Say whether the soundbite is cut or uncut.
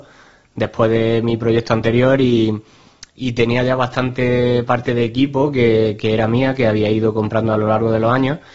uncut